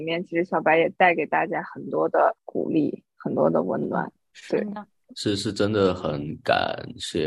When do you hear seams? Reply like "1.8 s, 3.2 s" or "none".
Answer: 2.4 s